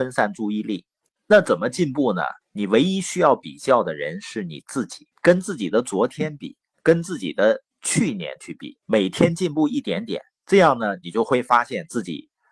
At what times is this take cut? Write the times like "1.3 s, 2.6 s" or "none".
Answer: 1.0 s, 2.4 s, 5.1 s, 6.7 s, 7.7 s, 8.8 s